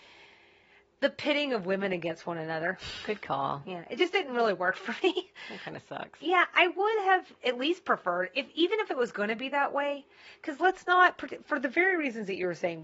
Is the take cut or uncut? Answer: uncut